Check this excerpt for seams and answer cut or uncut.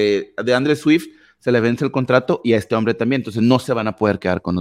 uncut